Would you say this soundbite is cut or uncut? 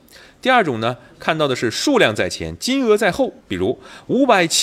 cut